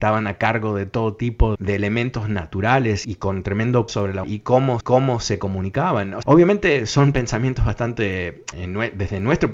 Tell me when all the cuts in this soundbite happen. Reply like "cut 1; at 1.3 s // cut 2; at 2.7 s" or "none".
cut 1; at 1.5 s // cut 2; at 3.0 s // cut 3; at 3.9 s // cut 4; at 4.2 s // cut 5; at 4.8 s // cut 6; at 6.2 s // cut 7; at 8.5 s